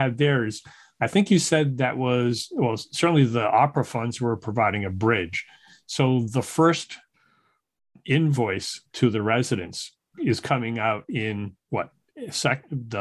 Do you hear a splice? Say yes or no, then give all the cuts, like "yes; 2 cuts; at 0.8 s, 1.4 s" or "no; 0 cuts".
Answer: no; 0 cuts